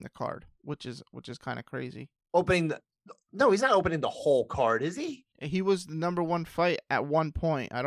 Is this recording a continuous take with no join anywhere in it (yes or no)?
no